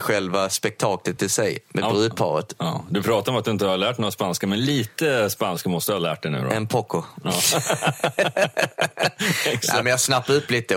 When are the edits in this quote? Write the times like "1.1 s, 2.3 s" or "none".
none